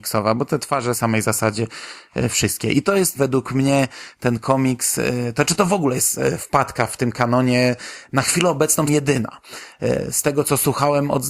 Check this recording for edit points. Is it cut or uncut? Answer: cut